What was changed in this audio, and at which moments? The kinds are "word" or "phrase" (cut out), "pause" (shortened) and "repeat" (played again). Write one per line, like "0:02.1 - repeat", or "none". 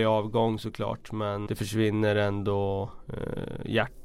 0:01.5 - word

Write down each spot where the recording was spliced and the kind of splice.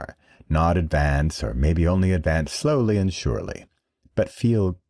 none

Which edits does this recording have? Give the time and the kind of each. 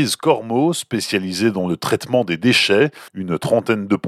0:03.1 - pause

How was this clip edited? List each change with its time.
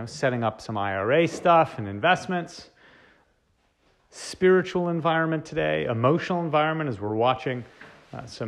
none

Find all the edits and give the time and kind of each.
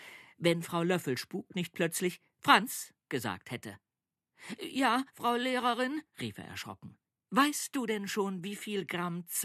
0:03.0 - pause
0:05.1 - pause
0:06.1 - pause
0:07.1 - pause

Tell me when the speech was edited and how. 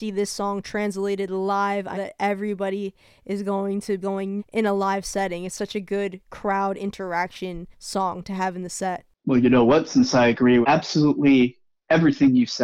0:01.9 - word
0:04.0 - word
0:04.4 - phrase
0:07.7 - pause
0:10.6 - word

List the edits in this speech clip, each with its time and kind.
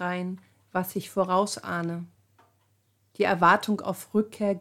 none

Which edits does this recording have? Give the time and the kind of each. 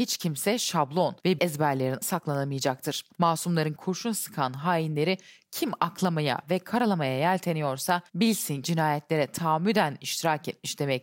0:01.4 - word
0:02.0 - word
0:03.8 - word
0:08.6 - word

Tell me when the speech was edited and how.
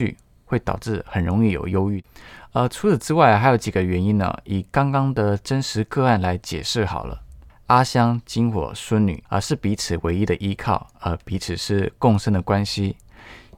0:07.5 - pause
0:09.3 - pause

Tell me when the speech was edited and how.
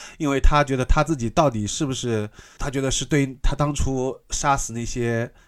0:02.6 - word

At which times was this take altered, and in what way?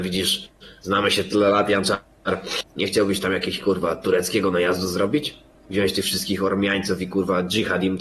0:02.7 - pause
0:05.5 - pause

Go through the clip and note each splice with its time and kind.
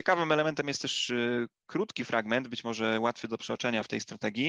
none

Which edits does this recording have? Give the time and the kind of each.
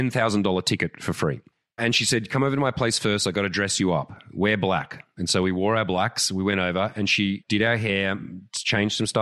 0:01.8 - word
0:07.4 - word

